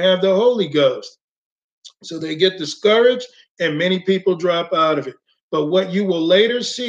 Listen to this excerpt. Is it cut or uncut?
uncut